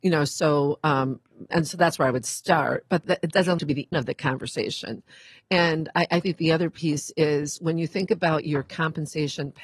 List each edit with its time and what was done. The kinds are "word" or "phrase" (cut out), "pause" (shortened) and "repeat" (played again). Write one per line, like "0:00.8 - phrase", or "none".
0:01.5 - word
0:03.0 - word
0:03.6 - word
0:03.9 - word
0:06.2 - word